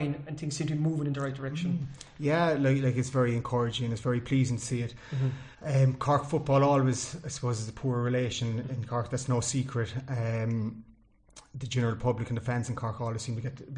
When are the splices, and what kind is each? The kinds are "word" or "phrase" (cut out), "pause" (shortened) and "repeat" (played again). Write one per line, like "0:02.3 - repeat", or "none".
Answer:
0:05.5 - pause